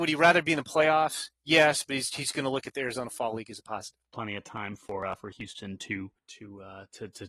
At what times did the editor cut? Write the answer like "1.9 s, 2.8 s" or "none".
4.0 s, 6.2 s